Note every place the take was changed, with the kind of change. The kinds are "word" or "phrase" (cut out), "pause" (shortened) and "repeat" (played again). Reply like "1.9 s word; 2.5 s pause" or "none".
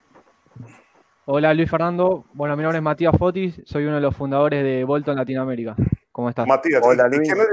6.0 s pause